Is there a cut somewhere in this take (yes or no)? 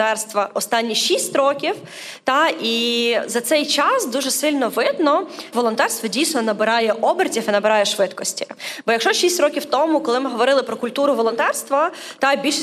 yes